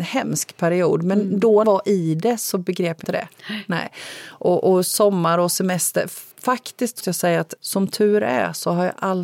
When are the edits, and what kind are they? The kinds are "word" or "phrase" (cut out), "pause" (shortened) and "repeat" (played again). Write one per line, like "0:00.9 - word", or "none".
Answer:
0:01.6 - phrase
0:03.0 - word
0:06.3 - pause
0:07.0 - word
0:07.6 - word